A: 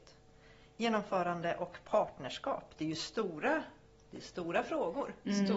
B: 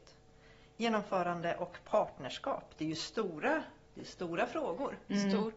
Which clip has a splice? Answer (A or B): B